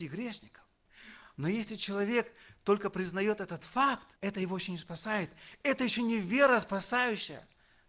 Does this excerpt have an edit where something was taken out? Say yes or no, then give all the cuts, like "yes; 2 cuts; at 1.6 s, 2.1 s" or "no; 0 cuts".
yes; 1 cut; at 4.2 s